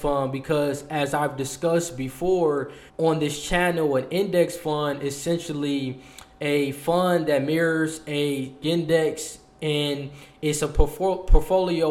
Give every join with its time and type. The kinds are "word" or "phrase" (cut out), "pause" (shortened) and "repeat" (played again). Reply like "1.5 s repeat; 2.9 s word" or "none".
2.9 s pause; 8.6 s word